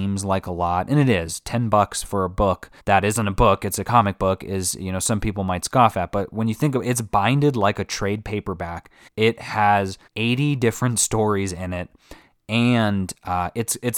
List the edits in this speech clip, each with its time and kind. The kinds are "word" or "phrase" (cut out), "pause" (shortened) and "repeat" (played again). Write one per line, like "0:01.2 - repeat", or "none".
0:02.8 - pause
0:09.1 - pause
0:10.1 - pause